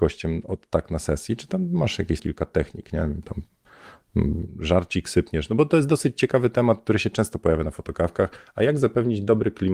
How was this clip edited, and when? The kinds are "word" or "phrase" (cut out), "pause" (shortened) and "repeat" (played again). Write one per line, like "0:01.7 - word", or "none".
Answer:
0:02.2 - word